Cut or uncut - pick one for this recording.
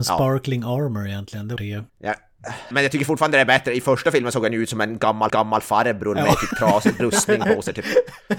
cut